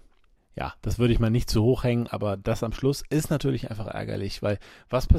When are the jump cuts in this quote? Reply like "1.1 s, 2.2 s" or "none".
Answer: none